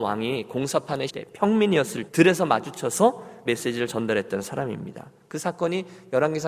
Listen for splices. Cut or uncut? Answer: cut